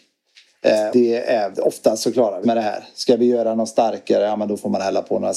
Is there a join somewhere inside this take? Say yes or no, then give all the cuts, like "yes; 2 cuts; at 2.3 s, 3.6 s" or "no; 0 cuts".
yes; 3 cuts; at 0.9 s, 1.5 s, 2.4 s